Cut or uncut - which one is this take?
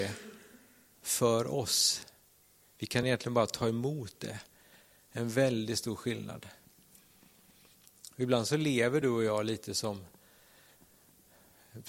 uncut